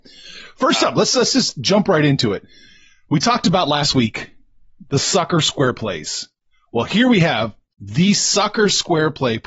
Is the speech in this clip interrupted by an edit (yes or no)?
no